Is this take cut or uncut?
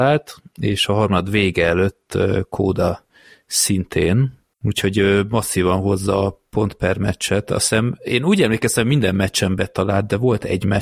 cut